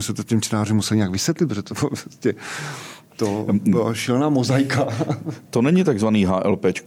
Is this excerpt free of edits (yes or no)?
no